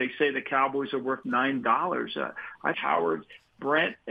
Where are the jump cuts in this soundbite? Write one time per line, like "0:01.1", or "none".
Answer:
0:01.6
0:02.7